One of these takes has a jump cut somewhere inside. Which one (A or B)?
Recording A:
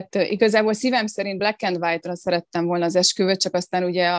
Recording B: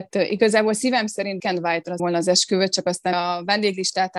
B